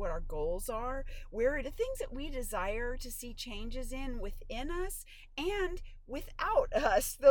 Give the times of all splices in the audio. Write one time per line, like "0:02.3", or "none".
0:01.6